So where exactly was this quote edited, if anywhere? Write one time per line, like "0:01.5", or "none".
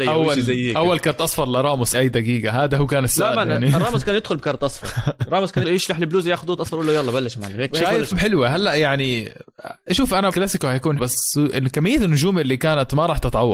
0:01.9
0:05.6
0:06.6
0:08.1
0:10.3
0:11.0

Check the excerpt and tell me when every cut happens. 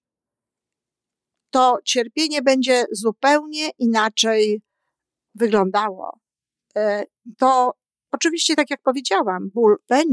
none

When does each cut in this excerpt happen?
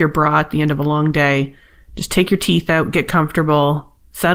none

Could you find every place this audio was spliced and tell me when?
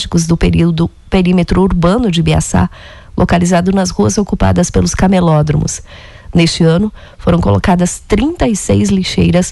none

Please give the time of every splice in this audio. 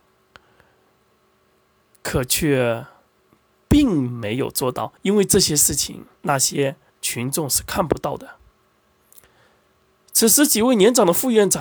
0:05.0
0:06.2
0:06.9

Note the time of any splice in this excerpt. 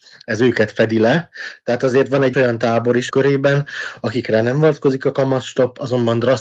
0:02.3
0:03.1

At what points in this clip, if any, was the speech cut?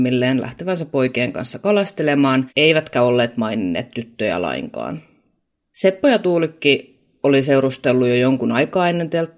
none

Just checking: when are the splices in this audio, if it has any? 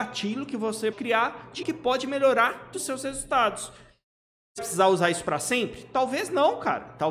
0:00.9
0:01.6
0:02.7
0:04.6

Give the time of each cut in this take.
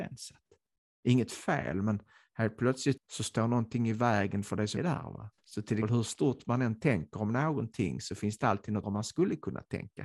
0:03.0
0:04.8
0:05.4
0:05.8
0:08.8

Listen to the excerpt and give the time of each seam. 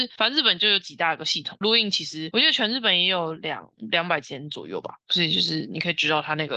0:01.6

